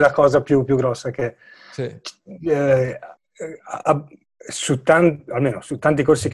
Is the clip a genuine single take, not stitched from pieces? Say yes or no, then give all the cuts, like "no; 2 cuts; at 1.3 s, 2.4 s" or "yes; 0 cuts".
yes; 0 cuts